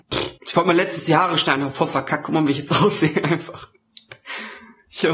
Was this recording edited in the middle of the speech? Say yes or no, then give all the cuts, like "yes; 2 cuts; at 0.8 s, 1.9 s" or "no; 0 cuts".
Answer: no; 0 cuts